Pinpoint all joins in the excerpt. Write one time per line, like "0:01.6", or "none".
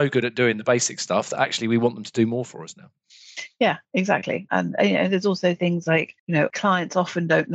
0:06.2